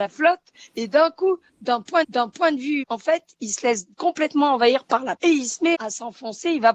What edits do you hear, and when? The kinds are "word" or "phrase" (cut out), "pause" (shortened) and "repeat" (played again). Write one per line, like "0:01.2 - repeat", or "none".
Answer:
0:02.0 - repeat
0:02.8 - word
0:03.9 - pause
0:05.2 - word
0:05.7 - word